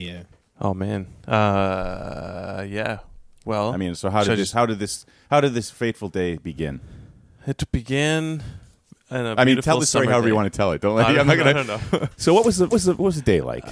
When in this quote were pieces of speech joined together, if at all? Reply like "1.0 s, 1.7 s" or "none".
12.7 s